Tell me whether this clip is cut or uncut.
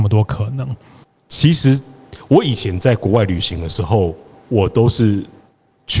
cut